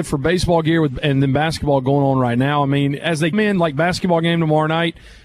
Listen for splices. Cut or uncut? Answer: cut